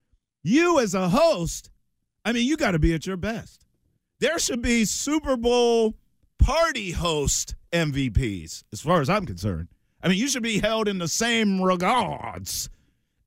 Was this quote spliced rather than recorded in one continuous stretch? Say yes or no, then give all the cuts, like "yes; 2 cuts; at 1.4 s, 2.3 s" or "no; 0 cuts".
no; 0 cuts